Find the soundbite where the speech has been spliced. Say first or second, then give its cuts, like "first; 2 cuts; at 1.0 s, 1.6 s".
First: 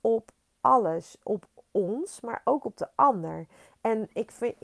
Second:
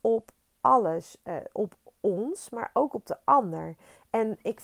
first; 1 cut; at 1.2 s